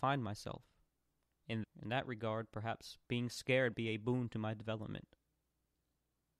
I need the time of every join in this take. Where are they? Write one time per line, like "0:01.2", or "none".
0:01.6
0:03.7